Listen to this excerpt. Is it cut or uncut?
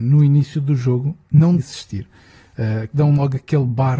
cut